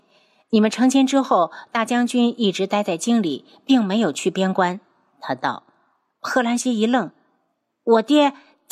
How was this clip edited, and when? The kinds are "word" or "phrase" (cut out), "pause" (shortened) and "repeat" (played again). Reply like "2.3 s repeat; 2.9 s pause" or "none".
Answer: none